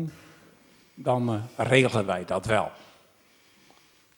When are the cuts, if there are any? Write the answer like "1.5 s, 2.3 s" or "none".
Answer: none